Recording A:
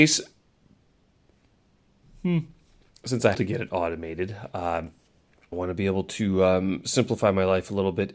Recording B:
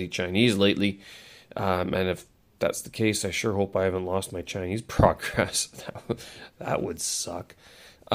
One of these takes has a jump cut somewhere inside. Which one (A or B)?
A